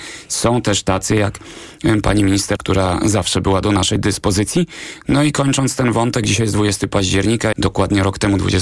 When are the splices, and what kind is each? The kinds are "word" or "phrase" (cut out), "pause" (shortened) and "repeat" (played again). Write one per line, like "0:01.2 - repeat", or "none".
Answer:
0:02.6 - word
0:07.5 - word